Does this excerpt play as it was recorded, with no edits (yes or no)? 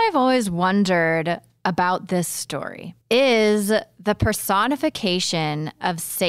no